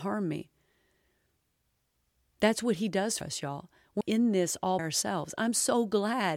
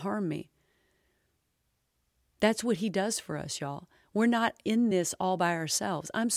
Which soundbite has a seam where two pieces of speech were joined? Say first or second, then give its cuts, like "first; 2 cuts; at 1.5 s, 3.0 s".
first; 3 cuts; at 3.2 s, 4.0 s, 4.8 s